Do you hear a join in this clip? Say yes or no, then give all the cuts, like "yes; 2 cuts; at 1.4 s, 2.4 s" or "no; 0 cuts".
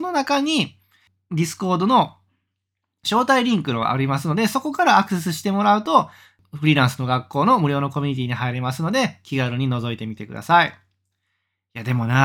no; 0 cuts